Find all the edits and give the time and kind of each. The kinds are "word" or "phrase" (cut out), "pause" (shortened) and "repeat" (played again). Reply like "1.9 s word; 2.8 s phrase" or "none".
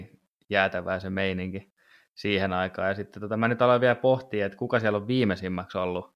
none